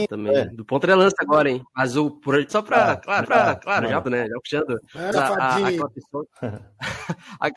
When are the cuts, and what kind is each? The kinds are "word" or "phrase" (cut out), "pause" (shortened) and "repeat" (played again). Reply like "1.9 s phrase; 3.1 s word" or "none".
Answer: 2.5 s phrase; 3.2 s repeat; 4.0 s word; 5.1 s word; 5.8 s word

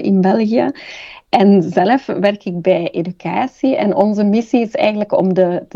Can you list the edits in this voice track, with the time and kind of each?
none

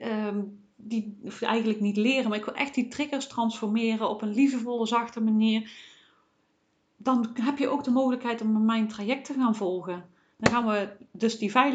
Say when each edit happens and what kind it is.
none

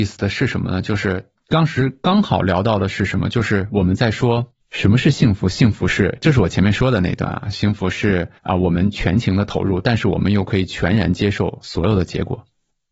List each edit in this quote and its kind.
4.6 s pause; 8.4 s pause

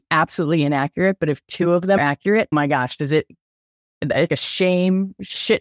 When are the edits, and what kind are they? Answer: 2.0 s word; 2.5 s word; 4.3 s word

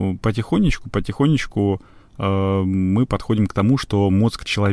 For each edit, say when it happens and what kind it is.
none

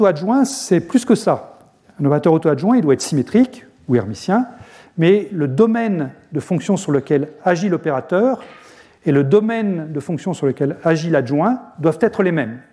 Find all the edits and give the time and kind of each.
none

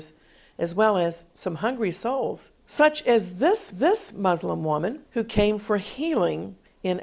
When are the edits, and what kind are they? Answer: 2.6 s pause; 3.7 s repeat; 5.1 s pause

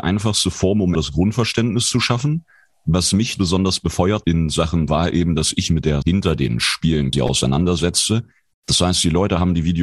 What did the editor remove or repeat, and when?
0.9 s word; 3.3 s word; 4.2 s word; 4.9 s word; 5.7 s word; 6.0 s word; 7.1 s word

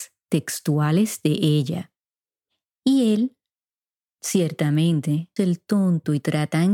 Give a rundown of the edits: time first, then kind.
5.4 s word

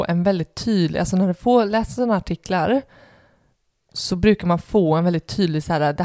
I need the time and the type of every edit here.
none

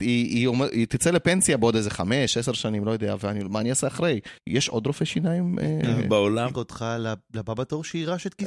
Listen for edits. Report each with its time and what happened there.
3.2 s word; 4.4 s pause; 6.5 s word

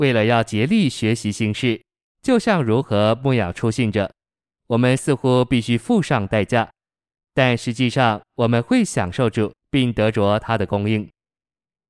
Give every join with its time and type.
9.6 s pause

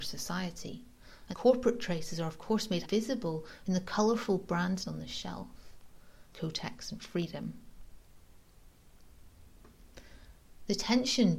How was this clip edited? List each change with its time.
1.3 s word; 2.8 s word; 4.8 s word; 6.3 s word

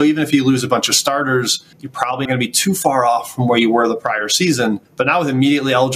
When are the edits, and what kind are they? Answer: 1.7 s pause; 2.3 s word; 4.9 s pause

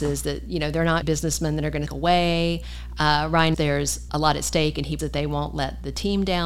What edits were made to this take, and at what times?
1.0 s word; 1.9 s word; 3.5 s word; 4.1 s word; 5.0 s word

